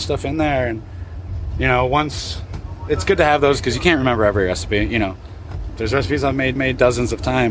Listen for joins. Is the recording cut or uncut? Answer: cut